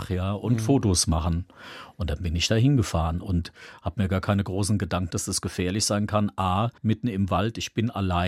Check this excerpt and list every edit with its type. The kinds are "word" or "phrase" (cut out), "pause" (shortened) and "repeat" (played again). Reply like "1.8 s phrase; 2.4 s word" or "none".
5.1 s word; 6.8 s pause